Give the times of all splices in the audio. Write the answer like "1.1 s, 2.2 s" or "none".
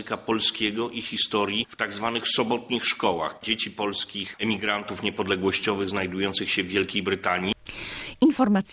none